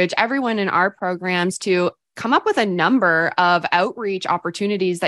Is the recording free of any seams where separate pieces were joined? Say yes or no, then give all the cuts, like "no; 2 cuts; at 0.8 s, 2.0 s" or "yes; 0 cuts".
yes; 0 cuts